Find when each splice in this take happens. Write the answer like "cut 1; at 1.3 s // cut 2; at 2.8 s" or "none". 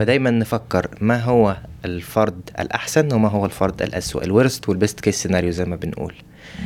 none